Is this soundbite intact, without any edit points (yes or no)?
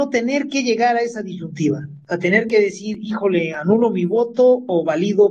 yes